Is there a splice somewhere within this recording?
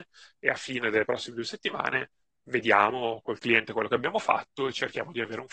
no; 0 cuts

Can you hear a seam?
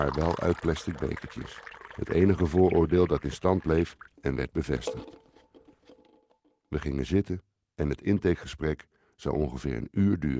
no; 0 cuts

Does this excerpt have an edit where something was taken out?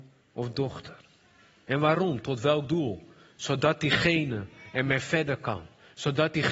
no; 0 cuts

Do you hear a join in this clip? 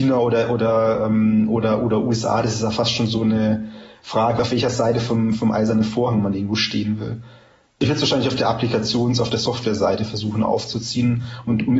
no; 0 cuts

